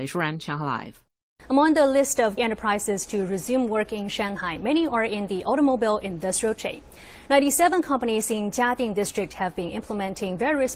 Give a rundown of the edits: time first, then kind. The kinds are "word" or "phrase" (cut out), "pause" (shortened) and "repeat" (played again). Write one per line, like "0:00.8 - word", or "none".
0:02.4 - word